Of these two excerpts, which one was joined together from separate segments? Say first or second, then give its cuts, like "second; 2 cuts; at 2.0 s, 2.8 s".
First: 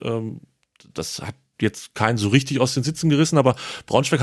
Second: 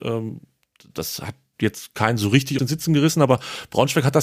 second; 1 cut; at 2.6 s